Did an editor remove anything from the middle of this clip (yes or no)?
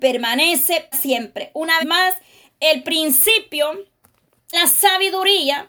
yes